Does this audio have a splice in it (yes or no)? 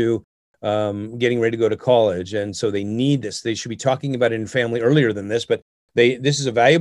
no